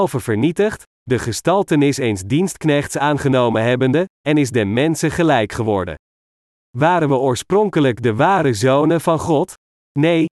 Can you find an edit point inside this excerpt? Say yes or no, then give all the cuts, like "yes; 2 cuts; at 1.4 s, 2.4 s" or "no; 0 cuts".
no; 0 cuts